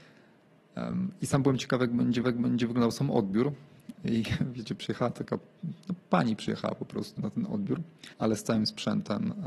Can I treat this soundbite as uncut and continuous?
no; 3 cuts; at 2.2 s, 7.2 s, 8.1 s

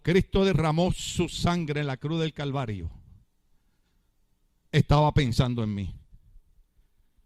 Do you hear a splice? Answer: no; 0 cuts

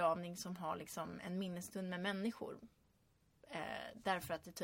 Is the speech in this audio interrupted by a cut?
no; 0 cuts

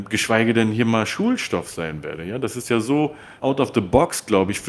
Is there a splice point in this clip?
no; 0 cuts

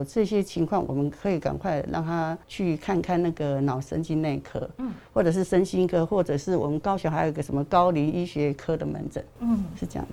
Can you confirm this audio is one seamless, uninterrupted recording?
no; 1 cut; at 2.4 s

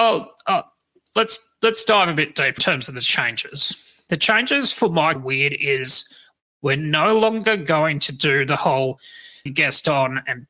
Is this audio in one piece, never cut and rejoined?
no; 4 cuts; at 1.1 s, 2.6 s, 5.1 s, 9.5 s

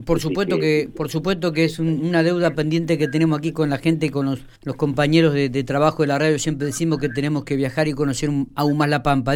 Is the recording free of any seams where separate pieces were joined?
no; 1 cut; at 4.6 s

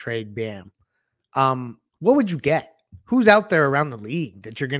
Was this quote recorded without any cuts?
no; 1 cut; at 1.9 s

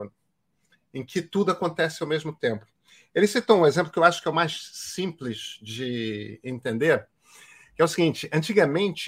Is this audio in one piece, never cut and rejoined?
yes; 0 cuts

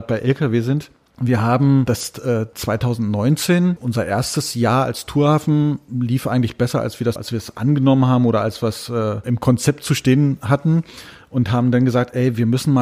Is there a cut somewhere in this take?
yes; 2 cuts; at 7.2 s, 9.2 s

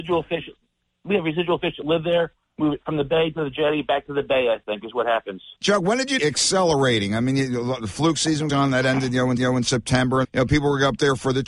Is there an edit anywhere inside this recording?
yes; 5 cuts; at 5.6 s, 6.2 s, 8.5 s, 9.4 s, 10.2 s

